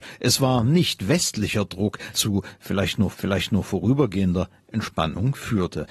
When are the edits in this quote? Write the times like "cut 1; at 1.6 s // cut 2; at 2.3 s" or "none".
cut 1; at 2.1 s // cut 2; at 3.1 s